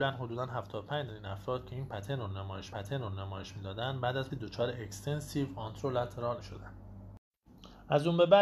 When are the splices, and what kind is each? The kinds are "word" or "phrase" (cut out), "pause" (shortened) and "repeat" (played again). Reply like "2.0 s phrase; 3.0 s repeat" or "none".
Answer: 1.1 s word; 2.7 s repeat; 4.3 s word; 6.4 s word